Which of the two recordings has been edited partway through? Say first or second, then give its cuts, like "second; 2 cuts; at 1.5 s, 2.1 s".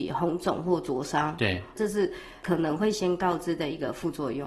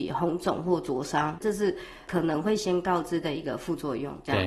second; 1 cut; at 1.4 s